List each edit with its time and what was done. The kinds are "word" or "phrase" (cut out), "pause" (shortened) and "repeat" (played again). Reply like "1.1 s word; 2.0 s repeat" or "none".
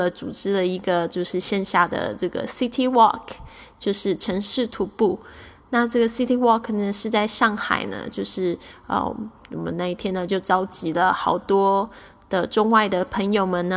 none